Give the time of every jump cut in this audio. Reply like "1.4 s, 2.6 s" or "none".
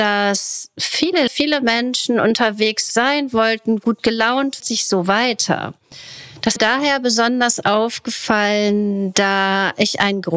1.3 s, 2.9 s, 4.6 s, 6.6 s